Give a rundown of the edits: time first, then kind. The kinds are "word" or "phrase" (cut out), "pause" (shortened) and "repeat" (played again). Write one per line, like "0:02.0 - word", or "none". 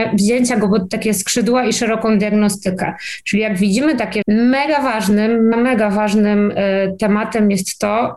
0:04.2 - word
0:05.5 - word